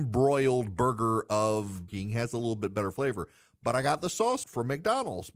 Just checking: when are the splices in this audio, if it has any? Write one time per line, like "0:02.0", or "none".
0:01.9
0:04.4